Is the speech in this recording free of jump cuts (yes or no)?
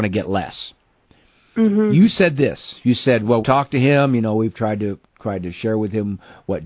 no